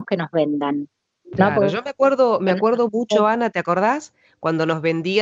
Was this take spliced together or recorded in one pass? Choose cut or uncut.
uncut